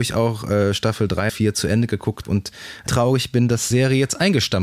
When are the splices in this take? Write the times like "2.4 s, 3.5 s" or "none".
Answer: 1.3 s, 2.2 s, 2.9 s, 3.7 s